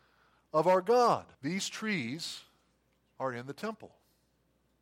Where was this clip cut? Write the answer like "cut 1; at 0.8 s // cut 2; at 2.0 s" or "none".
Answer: cut 1; at 1.3 s